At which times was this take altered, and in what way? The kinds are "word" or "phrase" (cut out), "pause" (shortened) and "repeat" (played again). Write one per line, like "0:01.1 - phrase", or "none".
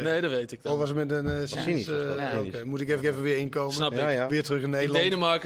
0:03.0 - repeat